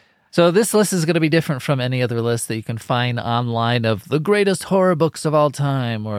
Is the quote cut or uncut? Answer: uncut